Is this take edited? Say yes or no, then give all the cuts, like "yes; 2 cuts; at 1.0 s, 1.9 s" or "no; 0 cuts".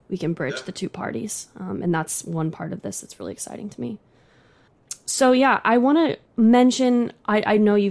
yes; 1 cut; at 6.2 s